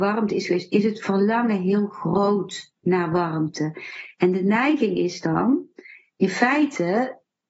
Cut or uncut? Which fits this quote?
uncut